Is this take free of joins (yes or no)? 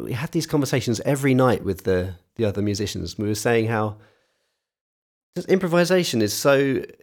yes